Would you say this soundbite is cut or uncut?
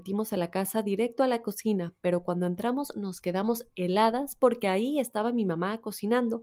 uncut